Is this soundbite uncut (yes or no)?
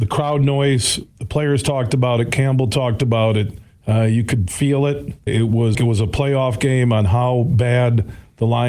no